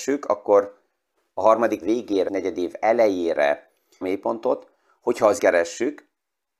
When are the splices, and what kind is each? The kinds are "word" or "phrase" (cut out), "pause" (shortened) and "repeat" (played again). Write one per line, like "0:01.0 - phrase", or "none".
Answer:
0:01.8 - word
0:02.3 - phrase
0:04.0 - phrase
0:05.4 - word